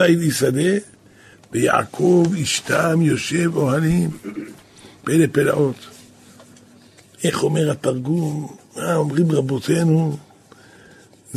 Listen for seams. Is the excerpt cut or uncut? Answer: uncut